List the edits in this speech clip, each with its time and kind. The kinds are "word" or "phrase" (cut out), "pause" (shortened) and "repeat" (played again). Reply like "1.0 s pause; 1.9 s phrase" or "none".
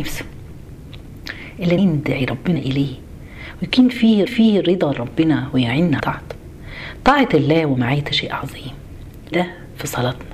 1.8 s word; 2.6 s phrase; 4.3 s repeat; 6.0 s word; 8.1 s word; 9.3 s word